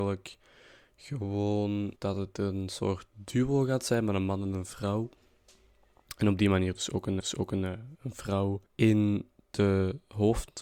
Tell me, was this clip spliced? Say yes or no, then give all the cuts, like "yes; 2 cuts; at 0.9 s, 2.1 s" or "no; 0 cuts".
yes; 3 cuts; at 2.0 s, 7.2 s, 8.7 s